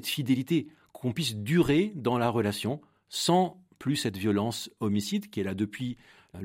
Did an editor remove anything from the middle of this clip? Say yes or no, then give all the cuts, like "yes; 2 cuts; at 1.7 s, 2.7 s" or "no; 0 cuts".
no; 0 cuts